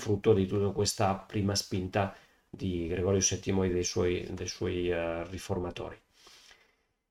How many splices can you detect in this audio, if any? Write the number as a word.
zero